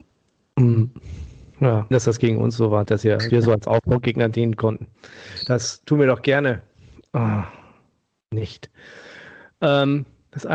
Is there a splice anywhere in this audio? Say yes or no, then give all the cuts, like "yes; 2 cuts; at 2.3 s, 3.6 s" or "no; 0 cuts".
yes; 3 cuts; at 1.9 s, 2.8 s, 3.3 s